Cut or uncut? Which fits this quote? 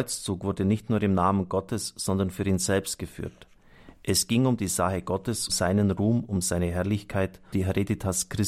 cut